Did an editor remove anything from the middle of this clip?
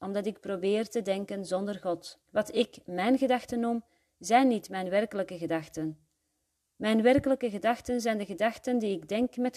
yes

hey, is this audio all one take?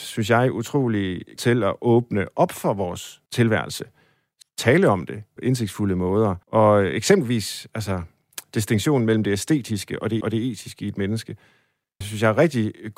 no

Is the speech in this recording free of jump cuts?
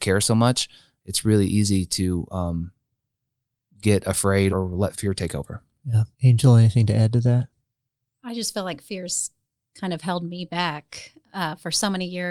no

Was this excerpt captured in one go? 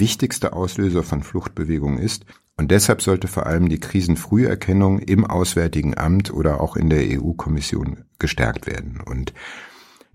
no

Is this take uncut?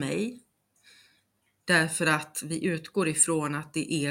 yes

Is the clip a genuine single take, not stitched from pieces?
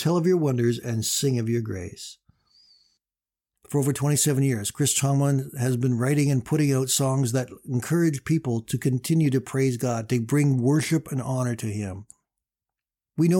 yes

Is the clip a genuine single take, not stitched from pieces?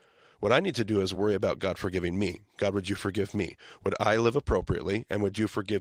yes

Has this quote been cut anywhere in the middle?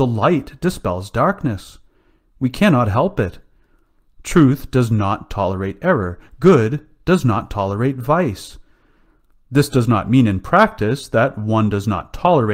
no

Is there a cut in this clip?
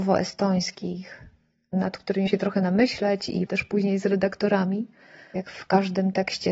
yes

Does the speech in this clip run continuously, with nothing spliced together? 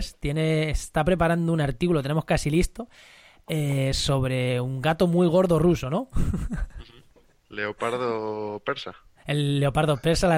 yes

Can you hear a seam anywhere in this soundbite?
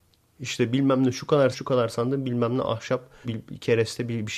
yes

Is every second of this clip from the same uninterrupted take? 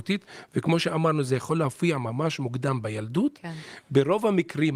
yes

